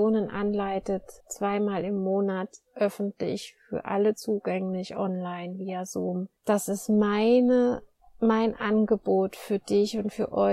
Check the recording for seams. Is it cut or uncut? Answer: cut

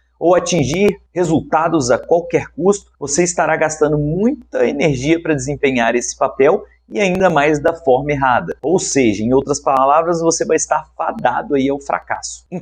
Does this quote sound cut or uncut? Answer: cut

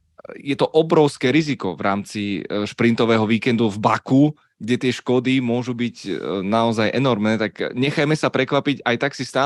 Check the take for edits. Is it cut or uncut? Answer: uncut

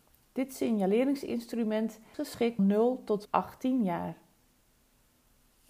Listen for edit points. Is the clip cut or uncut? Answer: cut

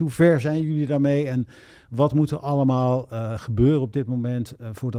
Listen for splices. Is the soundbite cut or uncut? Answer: uncut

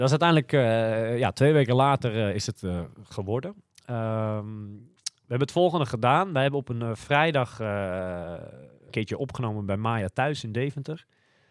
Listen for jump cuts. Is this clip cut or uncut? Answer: cut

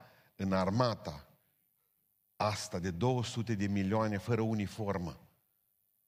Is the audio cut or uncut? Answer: uncut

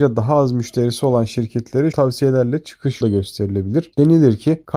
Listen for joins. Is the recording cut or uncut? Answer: cut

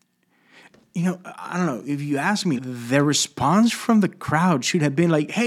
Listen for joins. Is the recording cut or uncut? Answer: cut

